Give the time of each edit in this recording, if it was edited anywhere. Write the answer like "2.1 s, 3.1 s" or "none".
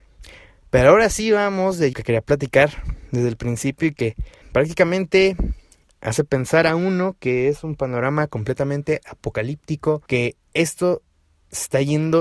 1.9 s, 4.4 s, 10.1 s